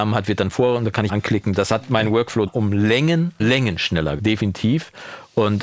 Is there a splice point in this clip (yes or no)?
yes